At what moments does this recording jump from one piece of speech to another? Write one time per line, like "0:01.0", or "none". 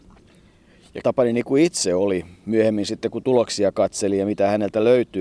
0:01.0